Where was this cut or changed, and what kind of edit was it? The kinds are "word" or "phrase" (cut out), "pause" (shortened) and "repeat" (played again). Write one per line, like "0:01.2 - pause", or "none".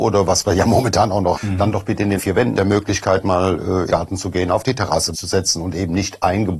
0:01.4 - word
0:02.2 - word
0:02.6 - word
0:03.9 - word
0:05.1 - word